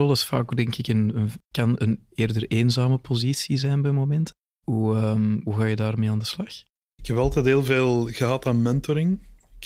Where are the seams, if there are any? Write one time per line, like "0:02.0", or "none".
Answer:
0:01.4
0:04.5
0:06.8